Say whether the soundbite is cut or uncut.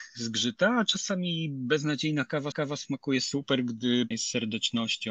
cut